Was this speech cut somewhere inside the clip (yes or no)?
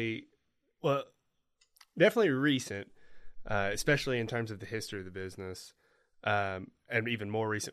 no